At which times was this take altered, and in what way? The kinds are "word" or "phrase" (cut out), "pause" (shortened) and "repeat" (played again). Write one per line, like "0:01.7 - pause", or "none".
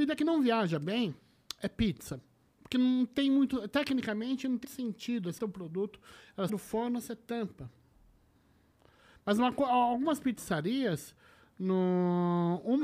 0:04.6 - word
0:05.4 - word
0:06.5 - word

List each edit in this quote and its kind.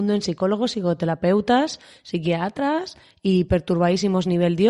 none

